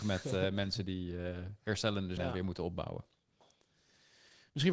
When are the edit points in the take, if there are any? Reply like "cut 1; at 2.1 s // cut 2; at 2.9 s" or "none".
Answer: cut 1; at 2.2 s